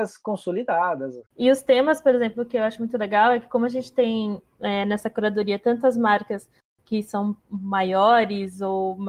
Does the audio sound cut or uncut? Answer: cut